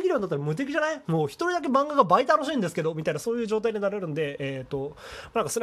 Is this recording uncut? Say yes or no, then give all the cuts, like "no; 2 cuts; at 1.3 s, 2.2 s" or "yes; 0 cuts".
yes; 0 cuts